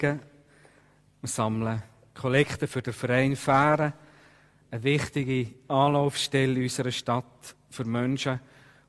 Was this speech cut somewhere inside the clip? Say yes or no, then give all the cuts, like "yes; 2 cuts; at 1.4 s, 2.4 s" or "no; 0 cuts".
no; 0 cuts